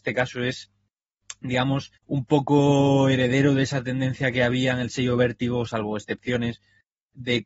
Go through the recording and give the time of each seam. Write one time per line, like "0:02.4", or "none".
0:02.0